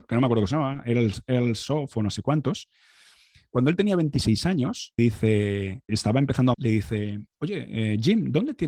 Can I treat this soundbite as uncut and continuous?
no; 3 cuts; at 5.0 s, 5.9 s, 6.5 s

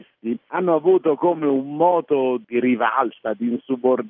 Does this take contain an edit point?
no; 0 cuts

